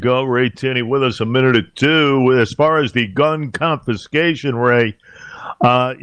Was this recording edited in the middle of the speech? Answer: no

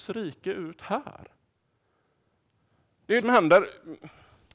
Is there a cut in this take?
yes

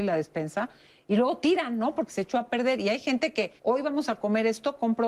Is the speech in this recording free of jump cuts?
no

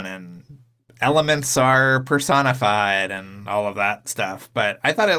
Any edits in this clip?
no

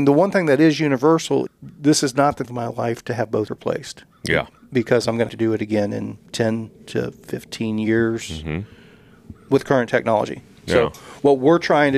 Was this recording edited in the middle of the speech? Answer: yes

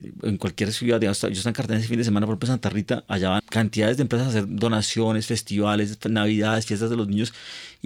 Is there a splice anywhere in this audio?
yes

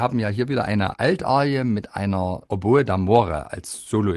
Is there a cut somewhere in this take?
no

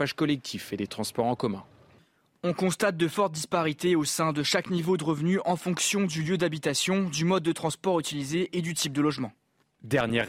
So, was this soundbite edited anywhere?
no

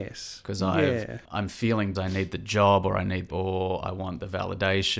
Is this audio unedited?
no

